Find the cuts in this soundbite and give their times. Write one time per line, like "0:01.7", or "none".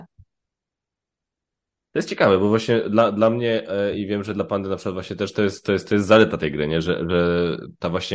none